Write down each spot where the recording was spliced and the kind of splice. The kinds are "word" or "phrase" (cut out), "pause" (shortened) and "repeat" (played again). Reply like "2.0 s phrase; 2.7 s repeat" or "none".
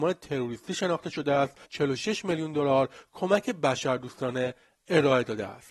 1.6 s pause